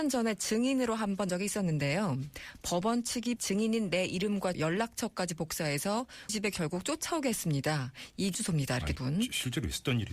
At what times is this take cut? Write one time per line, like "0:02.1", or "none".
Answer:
0:01.3
0:03.4
0:04.5
0:06.3
0:08.3
0:09.0